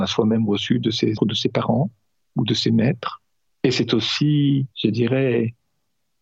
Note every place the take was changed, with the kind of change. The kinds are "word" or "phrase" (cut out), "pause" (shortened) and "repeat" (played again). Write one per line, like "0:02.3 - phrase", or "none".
0:01.2 - word
0:03.5 - pause
0:04.7 - pause